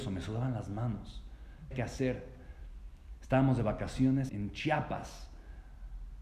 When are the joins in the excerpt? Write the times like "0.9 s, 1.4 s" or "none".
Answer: 1.7 s, 4.3 s